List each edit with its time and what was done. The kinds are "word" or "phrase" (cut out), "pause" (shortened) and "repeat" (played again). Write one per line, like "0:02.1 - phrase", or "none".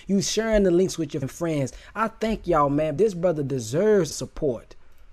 0:01.2 - word
0:03.0 - word
0:04.1 - word